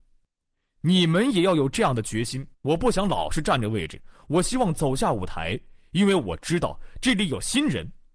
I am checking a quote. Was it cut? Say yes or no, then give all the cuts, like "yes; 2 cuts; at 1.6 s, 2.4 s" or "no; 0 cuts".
yes; 1 cut; at 2.5 s